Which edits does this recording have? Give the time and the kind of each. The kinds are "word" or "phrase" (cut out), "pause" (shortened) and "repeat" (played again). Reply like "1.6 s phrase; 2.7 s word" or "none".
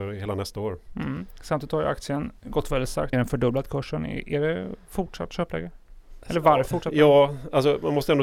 3.1 s phrase; 6.7 s phrase